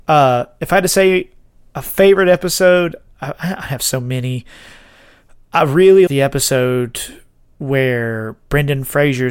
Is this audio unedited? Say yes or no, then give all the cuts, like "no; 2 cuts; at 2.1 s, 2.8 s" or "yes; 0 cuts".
no; 1 cut; at 6.1 s